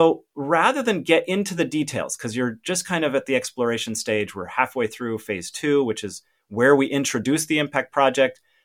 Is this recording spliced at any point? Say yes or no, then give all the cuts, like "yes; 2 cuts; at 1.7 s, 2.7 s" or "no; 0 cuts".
no; 0 cuts